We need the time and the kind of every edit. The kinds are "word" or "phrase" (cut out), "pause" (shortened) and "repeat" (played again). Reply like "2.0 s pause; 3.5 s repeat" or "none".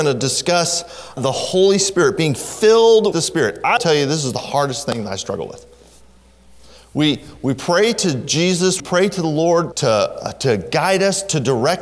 1.2 s word; 3.1 s word; 3.8 s word; 8.8 s word; 9.7 s word